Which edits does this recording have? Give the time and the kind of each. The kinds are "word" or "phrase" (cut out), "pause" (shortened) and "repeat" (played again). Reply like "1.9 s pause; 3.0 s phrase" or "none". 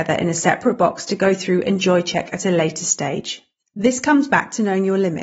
none